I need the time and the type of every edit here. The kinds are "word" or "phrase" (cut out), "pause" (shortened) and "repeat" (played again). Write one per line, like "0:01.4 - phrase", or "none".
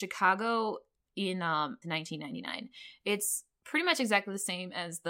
0:01.8 - phrase